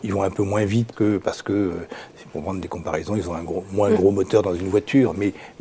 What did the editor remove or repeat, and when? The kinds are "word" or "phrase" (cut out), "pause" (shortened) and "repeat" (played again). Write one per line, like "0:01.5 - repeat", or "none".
0:00.9 - word
0:02.3 - word